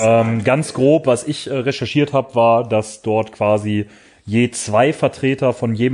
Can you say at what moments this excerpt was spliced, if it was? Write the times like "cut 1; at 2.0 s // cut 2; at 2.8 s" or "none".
none